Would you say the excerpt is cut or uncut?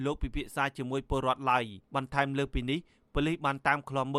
cut